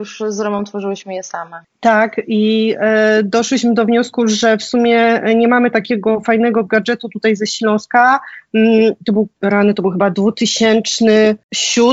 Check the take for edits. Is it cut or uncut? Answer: uncut